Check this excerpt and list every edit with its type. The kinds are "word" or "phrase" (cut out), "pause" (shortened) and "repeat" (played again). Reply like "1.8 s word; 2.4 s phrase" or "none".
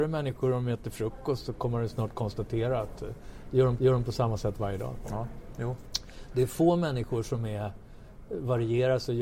3.8 s repeat